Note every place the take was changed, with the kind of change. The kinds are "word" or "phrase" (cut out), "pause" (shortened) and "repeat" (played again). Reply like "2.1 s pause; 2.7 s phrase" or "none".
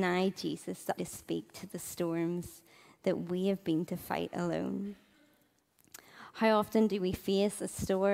1.0 s word; 3.9 s word